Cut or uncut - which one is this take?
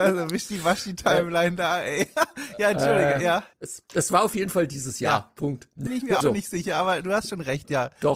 cut